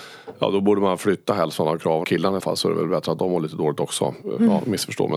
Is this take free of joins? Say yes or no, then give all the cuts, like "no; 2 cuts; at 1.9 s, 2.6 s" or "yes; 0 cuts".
no; 2 cuts; at 2.0 s, 2.4 s